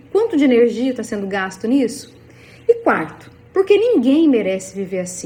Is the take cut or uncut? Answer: uncut